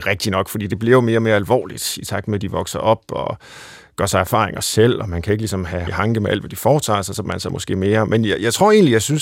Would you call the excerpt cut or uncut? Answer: cut